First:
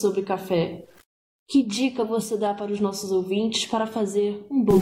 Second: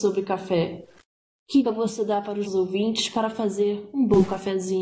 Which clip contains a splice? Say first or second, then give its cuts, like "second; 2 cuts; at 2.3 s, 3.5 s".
second; 2 cuts; at 1.6 s, 2.5 s